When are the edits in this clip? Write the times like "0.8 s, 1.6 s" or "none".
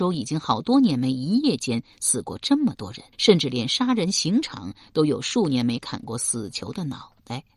3.1 s